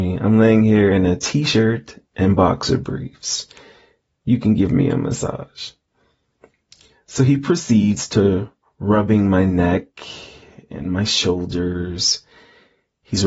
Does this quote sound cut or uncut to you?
uncut